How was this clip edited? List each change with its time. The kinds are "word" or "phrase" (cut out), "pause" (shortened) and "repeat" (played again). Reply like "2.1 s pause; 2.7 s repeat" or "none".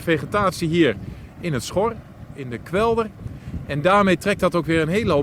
none